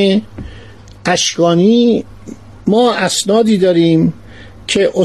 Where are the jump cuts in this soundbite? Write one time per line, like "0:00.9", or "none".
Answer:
none